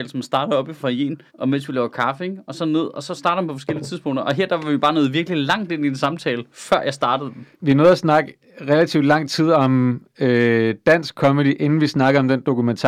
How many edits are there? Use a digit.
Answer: 3